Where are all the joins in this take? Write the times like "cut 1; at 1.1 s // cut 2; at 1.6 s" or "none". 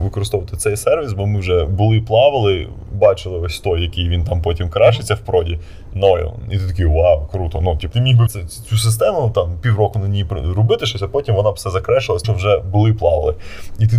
cut 1; at 7.9 s // cut 2; at 8.3 s // cut 3; at 12.2 s